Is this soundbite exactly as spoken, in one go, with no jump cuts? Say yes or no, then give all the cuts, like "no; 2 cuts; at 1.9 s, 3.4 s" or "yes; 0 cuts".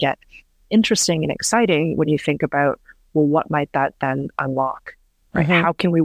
yes; 0 cuts